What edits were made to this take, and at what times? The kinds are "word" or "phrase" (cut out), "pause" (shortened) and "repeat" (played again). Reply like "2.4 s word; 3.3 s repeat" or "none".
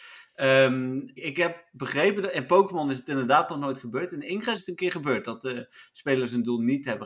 1.2 s word; 4.6 s word